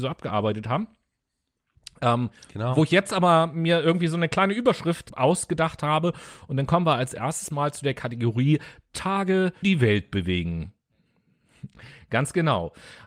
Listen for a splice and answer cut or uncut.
cut